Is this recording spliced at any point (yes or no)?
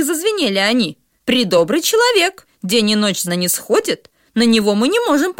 yes